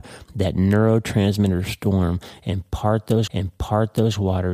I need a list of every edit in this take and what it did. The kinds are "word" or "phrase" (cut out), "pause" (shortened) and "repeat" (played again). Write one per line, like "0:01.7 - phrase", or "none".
0:03.3 - repeat